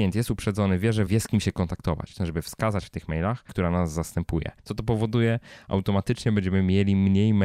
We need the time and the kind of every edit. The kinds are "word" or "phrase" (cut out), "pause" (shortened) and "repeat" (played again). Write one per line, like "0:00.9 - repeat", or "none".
0:01.1 - word
0:02.2 - phrase
0:03.5 - word
0:04.6 - pause